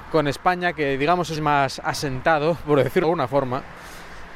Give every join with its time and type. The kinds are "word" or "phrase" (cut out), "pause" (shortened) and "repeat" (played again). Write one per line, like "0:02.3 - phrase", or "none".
0:01.4 - phrase
0:03.0 - word